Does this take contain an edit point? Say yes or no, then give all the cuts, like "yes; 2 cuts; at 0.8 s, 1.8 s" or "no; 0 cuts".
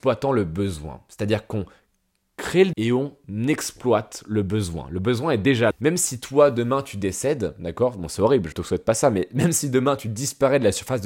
yes; 3 cuts; at 2.7 s, 5.7 s, 8.5 s